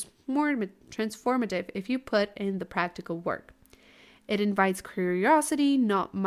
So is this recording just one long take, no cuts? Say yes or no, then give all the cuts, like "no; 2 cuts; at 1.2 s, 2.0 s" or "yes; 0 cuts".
yes; 0 cuts